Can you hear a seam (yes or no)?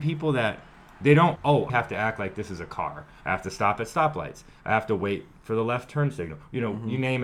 yes